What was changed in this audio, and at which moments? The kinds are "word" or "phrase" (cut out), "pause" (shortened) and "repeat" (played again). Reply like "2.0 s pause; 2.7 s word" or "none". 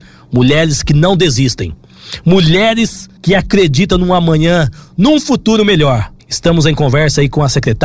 3.2 s pause; 6.2 s pause